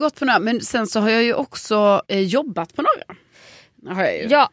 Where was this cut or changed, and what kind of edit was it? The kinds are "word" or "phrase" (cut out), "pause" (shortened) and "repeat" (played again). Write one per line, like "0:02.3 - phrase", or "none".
0:02.0 - pause